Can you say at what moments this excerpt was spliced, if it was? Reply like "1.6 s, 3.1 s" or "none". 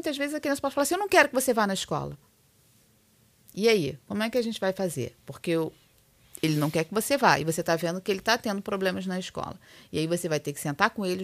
none